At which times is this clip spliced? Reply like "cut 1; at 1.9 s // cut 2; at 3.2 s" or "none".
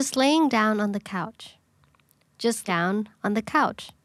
cut 1; at 2.7 s